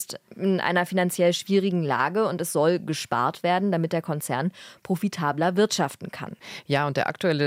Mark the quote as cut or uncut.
uncut